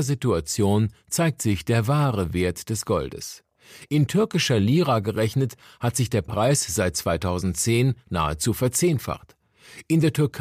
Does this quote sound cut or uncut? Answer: uncut